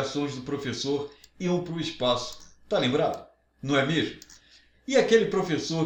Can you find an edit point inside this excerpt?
no; 0 cuts

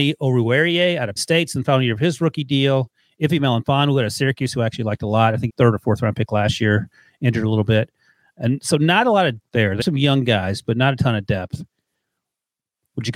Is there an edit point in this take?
yes; 4 cuts; at 1.2 s, 5.5 s, 9.4 s, 9.8 s

